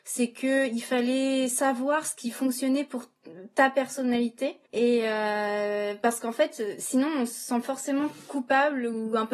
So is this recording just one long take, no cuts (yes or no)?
no